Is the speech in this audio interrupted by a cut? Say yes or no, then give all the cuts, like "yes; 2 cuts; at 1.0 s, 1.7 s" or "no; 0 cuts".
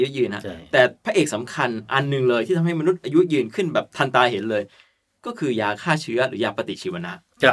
no; 0 cuts